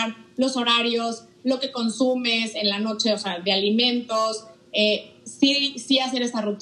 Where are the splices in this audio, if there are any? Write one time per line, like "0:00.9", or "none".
none